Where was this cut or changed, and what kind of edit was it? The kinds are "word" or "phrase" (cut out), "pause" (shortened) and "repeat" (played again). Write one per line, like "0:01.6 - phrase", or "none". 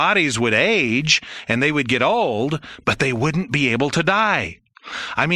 none